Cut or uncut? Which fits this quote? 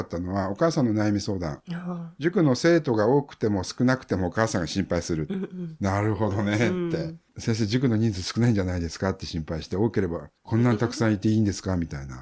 cut